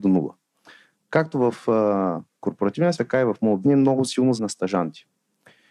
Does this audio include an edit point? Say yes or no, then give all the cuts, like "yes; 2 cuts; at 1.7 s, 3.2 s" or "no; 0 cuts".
yes; 3 cuts; at 3.0 s, 3.6 s, 4.4 s